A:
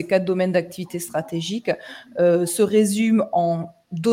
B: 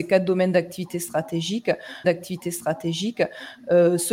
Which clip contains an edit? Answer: B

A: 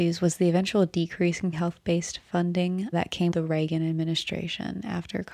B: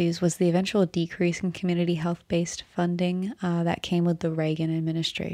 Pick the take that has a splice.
A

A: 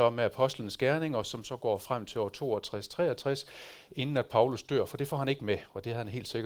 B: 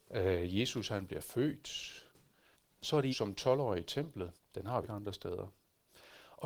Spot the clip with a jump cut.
B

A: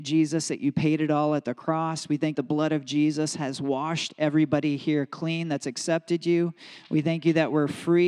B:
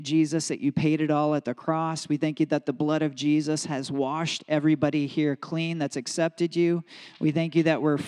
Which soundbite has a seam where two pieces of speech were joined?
A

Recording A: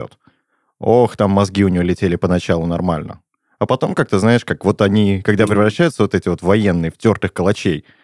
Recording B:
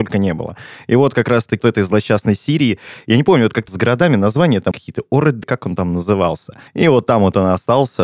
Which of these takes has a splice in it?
B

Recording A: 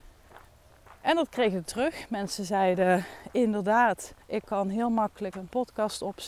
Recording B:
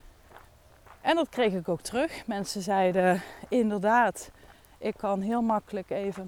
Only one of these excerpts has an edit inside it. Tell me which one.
A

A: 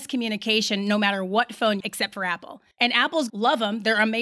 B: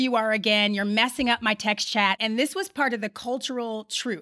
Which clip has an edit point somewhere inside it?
A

